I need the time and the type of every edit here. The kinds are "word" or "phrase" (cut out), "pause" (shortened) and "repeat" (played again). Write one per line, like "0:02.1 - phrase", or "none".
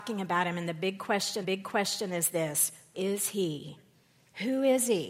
0:01.4 - repeat
0:02.9 - word